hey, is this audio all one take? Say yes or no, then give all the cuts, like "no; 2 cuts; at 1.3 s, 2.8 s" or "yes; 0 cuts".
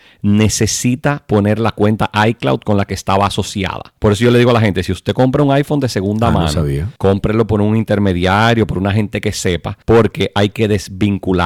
no; 3 cuts; at 4.0 s, 7.0 s, 9.8 s